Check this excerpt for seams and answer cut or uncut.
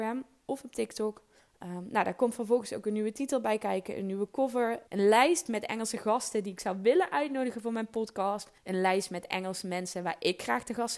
cut